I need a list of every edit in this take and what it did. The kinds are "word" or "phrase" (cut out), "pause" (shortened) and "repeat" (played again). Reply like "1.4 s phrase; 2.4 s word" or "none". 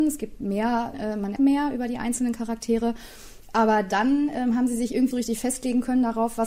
0.9 s word; 1.4 s word; 5.1 s word